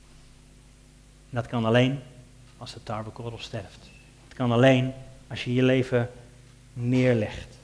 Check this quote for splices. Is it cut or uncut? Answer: uncut